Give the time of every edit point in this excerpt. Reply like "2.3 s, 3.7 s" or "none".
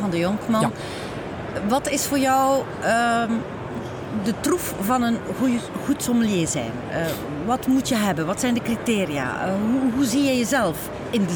none